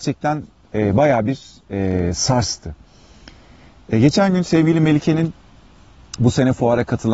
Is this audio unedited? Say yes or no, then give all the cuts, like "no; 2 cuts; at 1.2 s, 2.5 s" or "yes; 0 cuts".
yes; 0 cuts